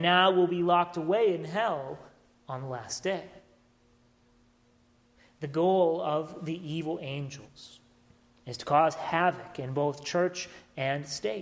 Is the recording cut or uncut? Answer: uncut